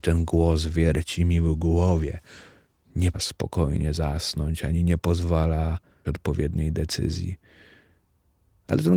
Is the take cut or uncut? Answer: cut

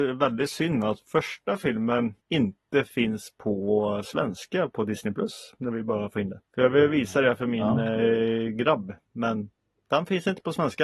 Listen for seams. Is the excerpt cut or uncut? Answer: cut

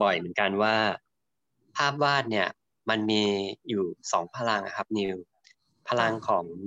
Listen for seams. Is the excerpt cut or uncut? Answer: uncut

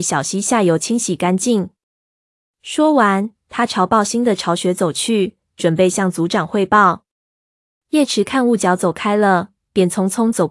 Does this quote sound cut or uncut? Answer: uncut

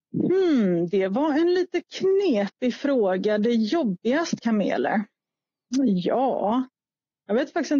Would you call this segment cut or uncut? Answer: cut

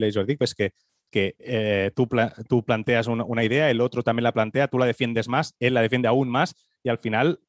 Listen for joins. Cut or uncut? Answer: uncut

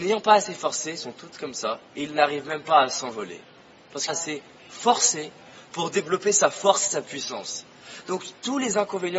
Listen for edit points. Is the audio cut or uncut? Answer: cut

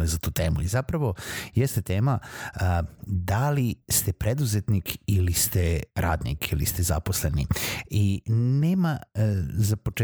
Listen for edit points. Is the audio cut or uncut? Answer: cut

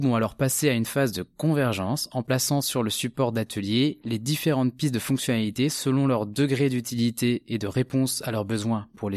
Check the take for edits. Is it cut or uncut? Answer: uncut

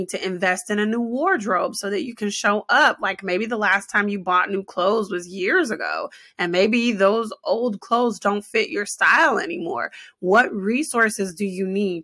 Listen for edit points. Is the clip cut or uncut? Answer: uncut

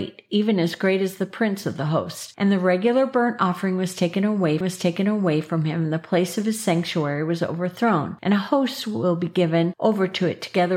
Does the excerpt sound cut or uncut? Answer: cut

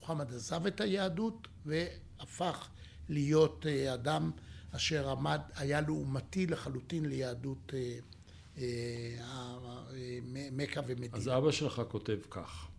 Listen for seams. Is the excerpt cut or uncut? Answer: uncut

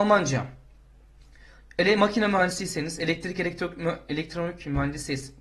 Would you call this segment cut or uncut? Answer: uncut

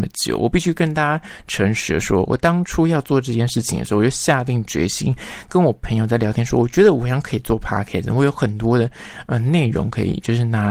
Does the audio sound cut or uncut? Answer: uncut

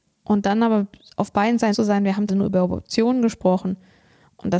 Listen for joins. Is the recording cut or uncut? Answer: cut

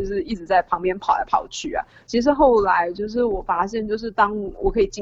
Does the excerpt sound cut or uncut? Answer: uncut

